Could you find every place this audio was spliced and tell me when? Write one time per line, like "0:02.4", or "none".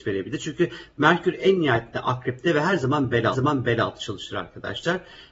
0:03.3

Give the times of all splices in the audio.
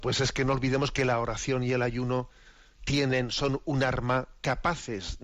none

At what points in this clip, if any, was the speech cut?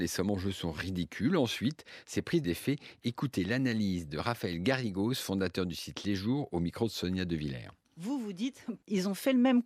0:02.4

